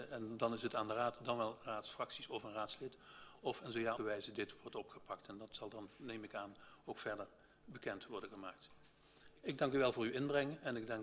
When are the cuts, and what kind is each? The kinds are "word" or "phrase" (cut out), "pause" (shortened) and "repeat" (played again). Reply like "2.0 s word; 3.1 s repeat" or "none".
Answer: 4.0 s phrase